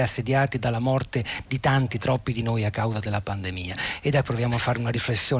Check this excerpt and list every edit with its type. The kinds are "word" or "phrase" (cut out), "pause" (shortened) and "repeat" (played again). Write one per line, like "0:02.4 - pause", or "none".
0:04.2 - word